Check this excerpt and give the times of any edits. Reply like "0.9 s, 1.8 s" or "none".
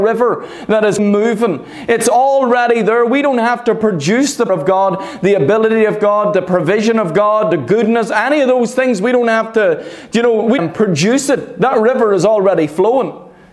1.0 s, 4.5 s, 10.6 s